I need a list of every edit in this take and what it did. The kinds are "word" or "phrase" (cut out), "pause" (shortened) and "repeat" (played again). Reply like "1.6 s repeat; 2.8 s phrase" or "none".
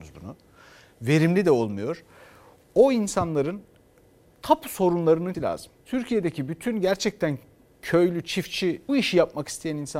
5.3 s word; 5.8 s pause; 8.9 s word